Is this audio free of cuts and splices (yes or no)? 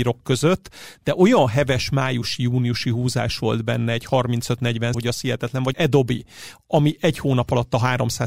no